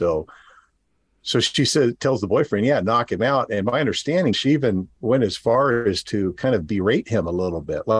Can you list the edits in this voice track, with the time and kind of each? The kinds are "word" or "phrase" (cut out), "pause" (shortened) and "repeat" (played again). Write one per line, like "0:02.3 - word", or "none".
0:04.3 - word

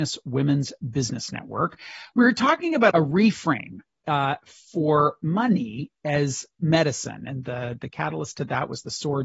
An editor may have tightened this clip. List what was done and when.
0:02.9 - word

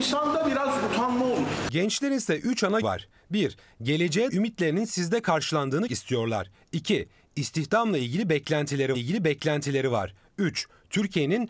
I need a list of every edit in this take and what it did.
0:02.8 - word
0:04.3 - word
0:05.9 - word
0:08.9 - repeat

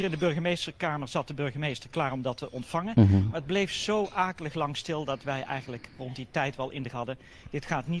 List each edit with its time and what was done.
0:06.9 - word

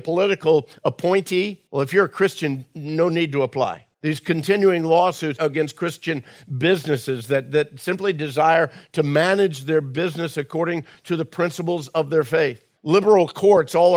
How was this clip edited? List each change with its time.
0:01.7 - pause
0:03.9 - pause
0:12.8 - pause

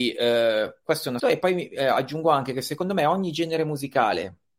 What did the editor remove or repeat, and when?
0:01.2 - word

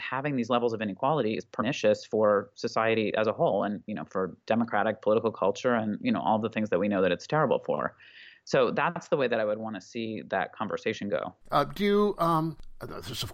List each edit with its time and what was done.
0:04.4 - pause
0:11.4 - pause

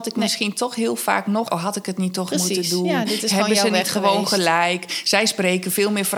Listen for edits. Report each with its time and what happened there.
0:01.4 - word

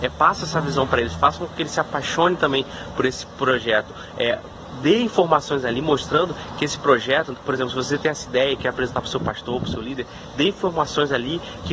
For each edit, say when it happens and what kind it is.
none

